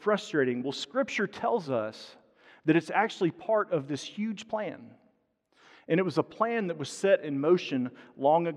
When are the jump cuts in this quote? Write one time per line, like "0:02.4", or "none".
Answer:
none